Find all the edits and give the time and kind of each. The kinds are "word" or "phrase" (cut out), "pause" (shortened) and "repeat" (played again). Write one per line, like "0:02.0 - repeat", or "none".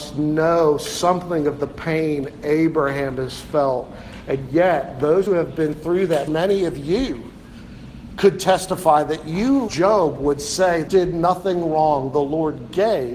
0:05.3 - word
0:06.3 - word
0:09.7 - word
0:10.9 - word